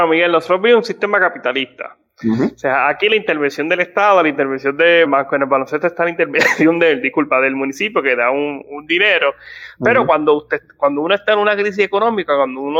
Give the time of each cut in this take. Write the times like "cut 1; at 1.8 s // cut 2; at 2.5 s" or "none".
cut 1; at 5.1 s // cut 2; at 8.6 s